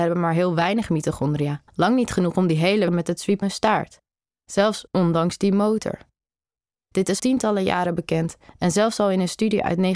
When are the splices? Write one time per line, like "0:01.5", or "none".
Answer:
0:01.7
0:02.9
0:03.4
0:07.2